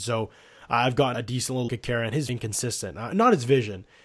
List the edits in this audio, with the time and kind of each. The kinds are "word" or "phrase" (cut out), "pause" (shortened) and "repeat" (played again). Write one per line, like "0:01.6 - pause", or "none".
0:01.1 - word
0:01.7 - word
0:02.3 - phrase